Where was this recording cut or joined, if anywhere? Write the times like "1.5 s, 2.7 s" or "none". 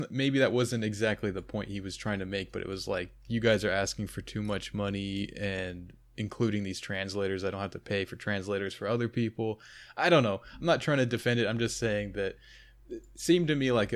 none